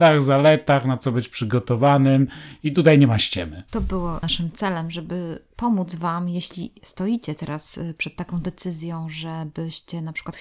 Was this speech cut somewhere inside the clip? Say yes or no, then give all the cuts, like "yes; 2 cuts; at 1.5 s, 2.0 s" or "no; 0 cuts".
no; 0 cuts